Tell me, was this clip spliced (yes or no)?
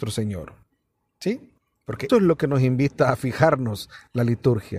yes